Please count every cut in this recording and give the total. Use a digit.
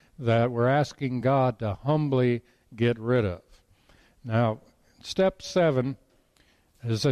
0